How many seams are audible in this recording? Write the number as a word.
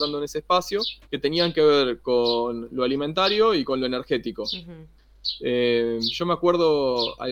one